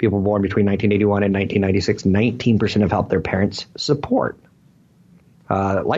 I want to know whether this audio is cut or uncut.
uncut